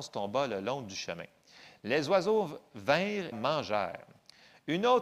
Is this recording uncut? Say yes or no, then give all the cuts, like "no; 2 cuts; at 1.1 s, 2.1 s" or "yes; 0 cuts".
no; 1 cut; at 3.3 s